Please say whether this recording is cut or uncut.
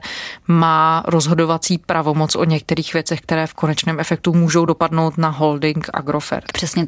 uncut